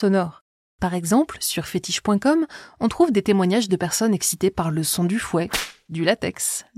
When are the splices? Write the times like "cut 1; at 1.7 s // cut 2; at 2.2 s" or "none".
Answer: none